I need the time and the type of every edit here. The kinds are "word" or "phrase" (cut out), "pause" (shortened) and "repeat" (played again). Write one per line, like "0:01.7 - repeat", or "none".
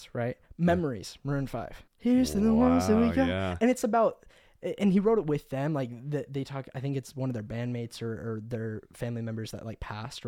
0:01.9 - pause